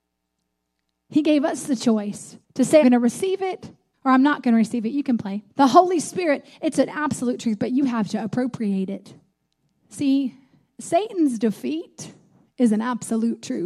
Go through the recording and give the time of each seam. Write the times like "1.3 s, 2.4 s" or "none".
2.4 s, 2.8 s, 3.9 s, 5.5 s, 9.3 s